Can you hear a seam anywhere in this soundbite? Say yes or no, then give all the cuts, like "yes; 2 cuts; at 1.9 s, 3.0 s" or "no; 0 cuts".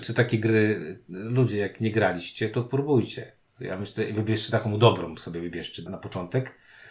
yes; 1 cut; at 5.9 s